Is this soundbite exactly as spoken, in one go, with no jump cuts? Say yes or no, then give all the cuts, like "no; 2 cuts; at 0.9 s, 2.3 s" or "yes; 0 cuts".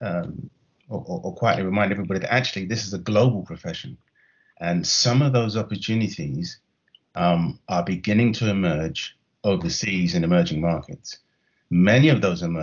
yes; 0 cuts